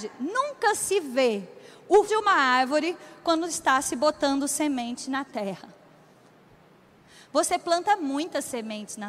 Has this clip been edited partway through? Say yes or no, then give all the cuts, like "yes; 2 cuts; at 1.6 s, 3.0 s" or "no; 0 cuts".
yes; 1 cut; at 2.1 s